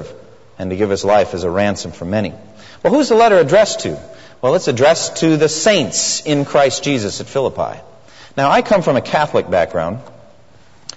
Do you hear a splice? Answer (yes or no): no